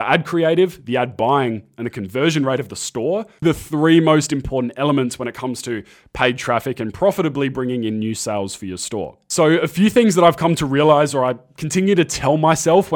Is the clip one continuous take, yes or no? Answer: no